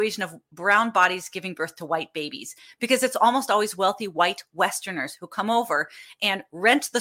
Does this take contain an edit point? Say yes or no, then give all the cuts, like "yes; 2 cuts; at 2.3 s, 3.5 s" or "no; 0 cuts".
no; 0 cuts